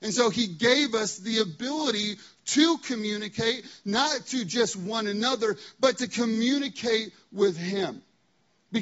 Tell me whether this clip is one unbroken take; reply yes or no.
yes